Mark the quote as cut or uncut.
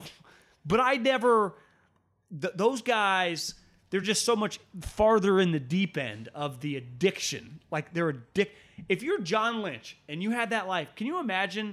uncut